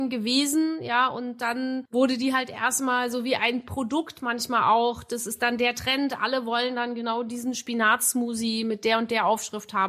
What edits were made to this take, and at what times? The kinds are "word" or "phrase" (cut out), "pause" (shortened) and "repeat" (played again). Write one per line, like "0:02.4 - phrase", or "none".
none